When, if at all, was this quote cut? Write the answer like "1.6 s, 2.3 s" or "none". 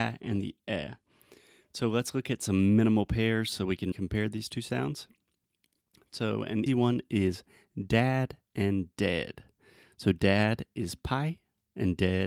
3.9 s, 6.7 s